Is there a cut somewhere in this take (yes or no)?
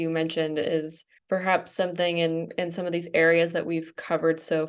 no